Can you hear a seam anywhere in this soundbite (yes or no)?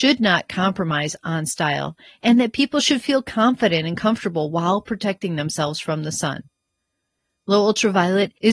no